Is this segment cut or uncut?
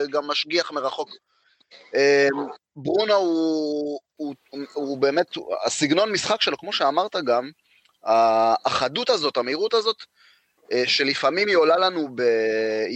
uncut